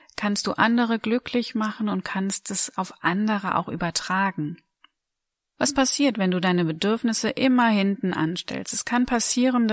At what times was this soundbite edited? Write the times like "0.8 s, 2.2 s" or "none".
none